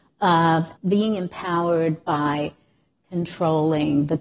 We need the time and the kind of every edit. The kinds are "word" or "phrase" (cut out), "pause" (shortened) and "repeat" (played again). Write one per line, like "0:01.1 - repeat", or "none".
none